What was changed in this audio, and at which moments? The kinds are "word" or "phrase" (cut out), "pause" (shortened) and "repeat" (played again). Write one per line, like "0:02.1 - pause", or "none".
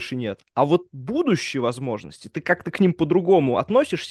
none